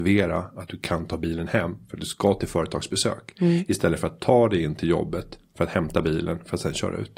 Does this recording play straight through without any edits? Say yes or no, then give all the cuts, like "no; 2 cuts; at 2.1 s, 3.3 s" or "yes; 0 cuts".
yes; 0 cuts